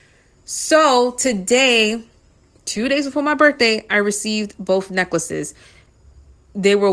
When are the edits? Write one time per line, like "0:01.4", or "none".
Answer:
none